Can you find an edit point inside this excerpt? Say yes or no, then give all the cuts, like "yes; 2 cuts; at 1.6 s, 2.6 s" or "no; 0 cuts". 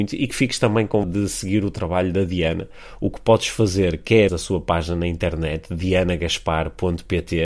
yes; 2 cuts; at 1.0 s, 4.3 s